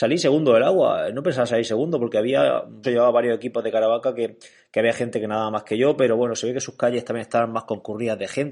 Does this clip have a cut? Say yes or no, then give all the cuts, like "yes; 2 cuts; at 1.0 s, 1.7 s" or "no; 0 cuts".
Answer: yes; 1 cut; at 2.8 s